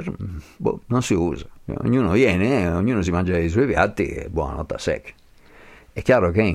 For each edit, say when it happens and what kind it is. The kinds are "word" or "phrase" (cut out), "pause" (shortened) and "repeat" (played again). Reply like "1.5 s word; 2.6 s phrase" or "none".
none